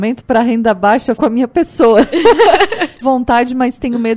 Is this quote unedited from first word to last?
no; 2 cuts; at 1.2 s, 3.0 s

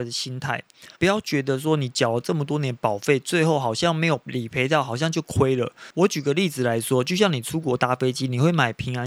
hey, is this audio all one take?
no; 1 cut; at 0.9 s

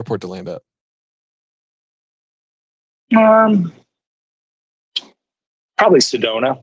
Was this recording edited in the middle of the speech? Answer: no; 0 cuts

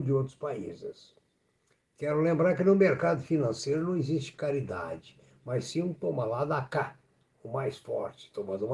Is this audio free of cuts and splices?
yes; 0 cuts

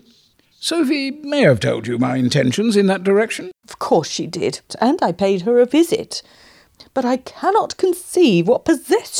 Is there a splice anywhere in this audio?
no; 0 cuts

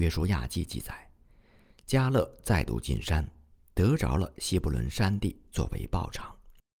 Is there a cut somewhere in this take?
no; 0 cuts

